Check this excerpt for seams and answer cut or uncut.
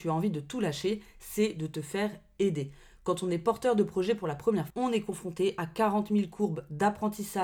cut